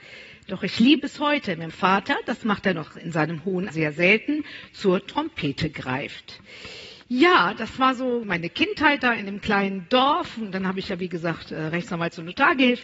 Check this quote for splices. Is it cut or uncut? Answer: cut